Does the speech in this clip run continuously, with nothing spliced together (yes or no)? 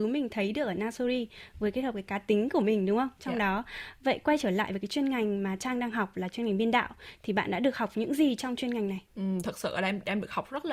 no